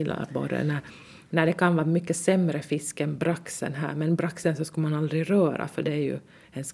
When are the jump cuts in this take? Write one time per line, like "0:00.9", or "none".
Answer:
none